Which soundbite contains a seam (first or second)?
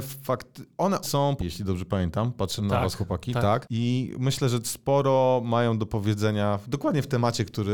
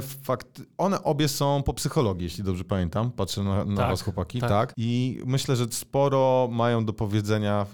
first